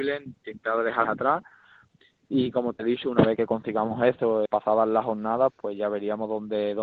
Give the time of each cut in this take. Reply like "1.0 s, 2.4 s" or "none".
1.0 s, 3.4 s, 4.5 s, 5.5 s